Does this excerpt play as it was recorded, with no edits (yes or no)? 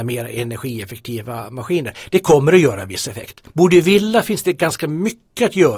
no